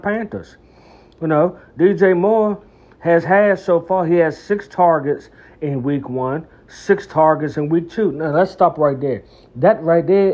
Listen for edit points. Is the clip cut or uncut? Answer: uncut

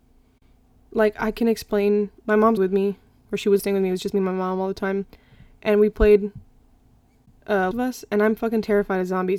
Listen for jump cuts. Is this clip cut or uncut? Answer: cut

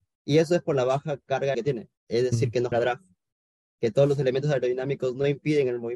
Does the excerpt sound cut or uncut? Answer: cut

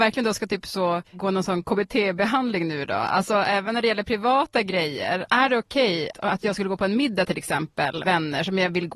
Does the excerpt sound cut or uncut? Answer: cut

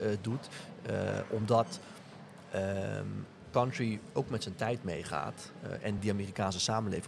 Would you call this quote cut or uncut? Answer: uncut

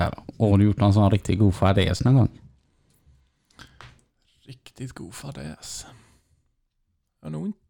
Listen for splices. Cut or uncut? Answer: uncut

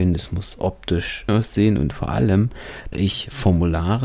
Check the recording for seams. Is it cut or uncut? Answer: cut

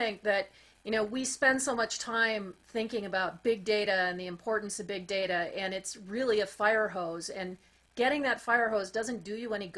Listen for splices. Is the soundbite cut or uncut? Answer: uncut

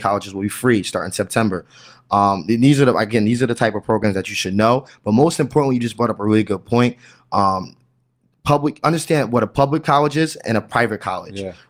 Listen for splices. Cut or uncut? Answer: uncut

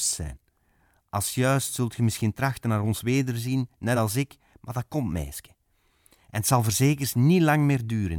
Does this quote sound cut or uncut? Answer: uncut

